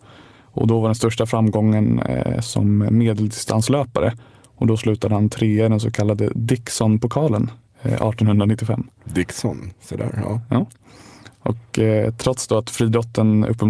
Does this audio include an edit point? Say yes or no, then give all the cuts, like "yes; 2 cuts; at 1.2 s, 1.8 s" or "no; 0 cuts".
no; 0 cuts